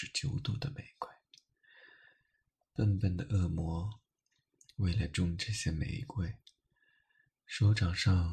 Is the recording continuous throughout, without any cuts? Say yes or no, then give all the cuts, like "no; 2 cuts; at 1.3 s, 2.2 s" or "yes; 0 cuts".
yes; 0 cuts